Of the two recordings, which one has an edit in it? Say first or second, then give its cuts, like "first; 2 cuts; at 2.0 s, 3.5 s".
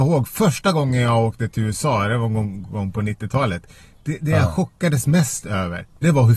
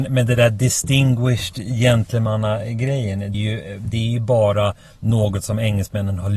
second; 1 cut; at 3.3 s